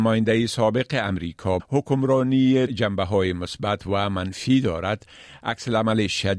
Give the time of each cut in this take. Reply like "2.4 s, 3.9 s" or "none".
1.6 s, 2.7 s